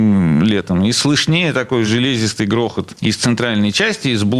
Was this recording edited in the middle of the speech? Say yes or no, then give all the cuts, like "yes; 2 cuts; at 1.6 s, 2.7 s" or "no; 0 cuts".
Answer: no; 0 cuts